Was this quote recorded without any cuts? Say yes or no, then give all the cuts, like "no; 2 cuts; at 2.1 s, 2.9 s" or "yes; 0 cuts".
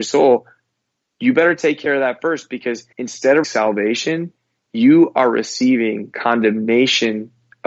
no; 2 cuts; at 2.9 s, 3.4 s